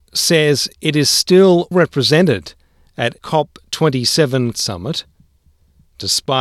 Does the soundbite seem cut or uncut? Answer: cut